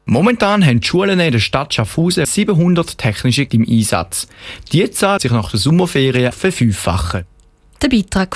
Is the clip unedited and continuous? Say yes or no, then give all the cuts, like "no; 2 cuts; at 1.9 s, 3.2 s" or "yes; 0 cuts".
no; 4 cuts; at 2.2 s, 3.5 s, 5.2 s, 6.3 s